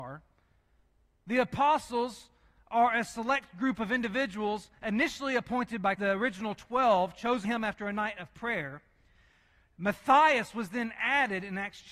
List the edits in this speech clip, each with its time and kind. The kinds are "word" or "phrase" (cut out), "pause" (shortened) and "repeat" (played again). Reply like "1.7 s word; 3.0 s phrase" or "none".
6.0 s word; 7.4 s word